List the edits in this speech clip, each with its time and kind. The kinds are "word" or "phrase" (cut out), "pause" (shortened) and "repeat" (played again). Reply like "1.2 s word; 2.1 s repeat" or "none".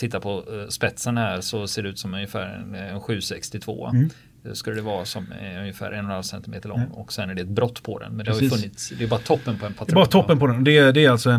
none